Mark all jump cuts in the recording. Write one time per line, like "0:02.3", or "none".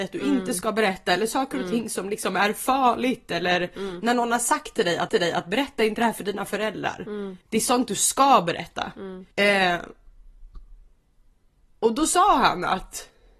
0:05.1
0:07.4
0:09.3